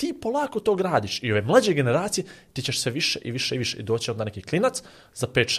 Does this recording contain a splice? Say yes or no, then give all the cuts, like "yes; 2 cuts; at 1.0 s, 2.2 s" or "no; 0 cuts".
no; 0 cuts